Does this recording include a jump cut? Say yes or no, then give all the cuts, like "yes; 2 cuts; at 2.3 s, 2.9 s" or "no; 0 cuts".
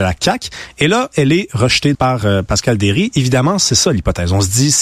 yes; 1 cut; at 1.9 s